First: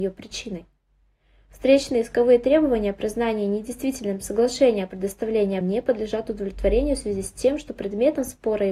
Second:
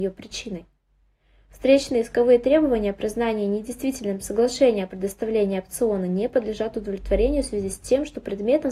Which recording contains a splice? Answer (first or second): first